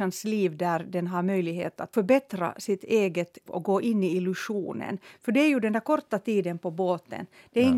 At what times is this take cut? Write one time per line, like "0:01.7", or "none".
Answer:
0:01.9
0:03.5